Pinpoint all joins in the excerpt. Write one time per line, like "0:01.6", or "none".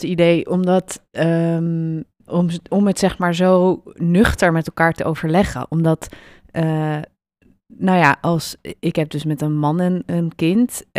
none